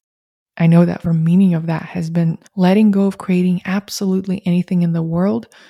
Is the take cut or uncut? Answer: cut